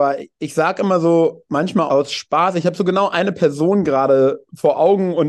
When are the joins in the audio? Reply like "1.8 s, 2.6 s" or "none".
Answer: 1.9 s

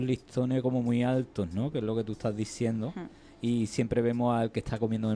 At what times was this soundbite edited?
none

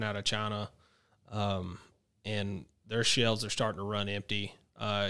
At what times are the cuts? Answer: none

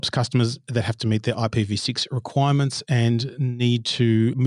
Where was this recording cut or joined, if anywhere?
none

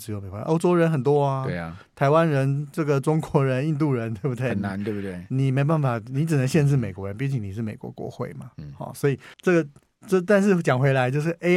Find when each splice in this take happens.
9.3 s

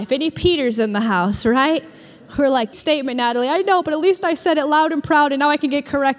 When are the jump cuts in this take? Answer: 2.7 s

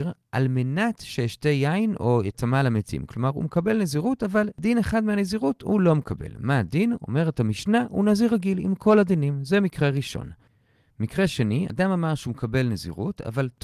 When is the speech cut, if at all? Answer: none

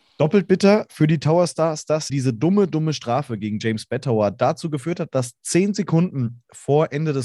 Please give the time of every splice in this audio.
2.1 s

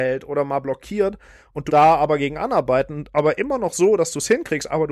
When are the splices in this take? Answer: 1.7 s

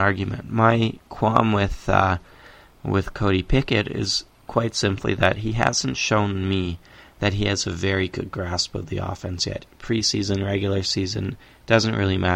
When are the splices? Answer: none

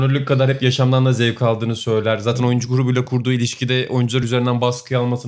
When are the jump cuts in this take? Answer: none

